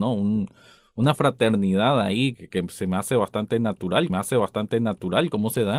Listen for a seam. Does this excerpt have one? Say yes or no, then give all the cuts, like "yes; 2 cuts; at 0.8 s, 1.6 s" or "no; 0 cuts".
yes; 2 cuts; at 2.3 s, 4.1 s